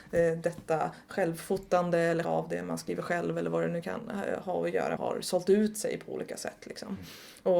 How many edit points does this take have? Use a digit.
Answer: 2